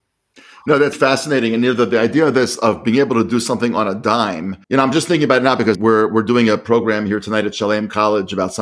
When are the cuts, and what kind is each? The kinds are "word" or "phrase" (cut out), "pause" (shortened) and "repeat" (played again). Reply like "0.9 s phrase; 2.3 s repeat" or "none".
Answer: 0.9 s word; 4.6 s pause; 5.7 s word